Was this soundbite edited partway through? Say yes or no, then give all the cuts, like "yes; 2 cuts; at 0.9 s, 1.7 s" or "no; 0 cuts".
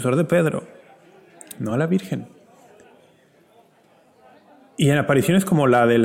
no; 0 cuts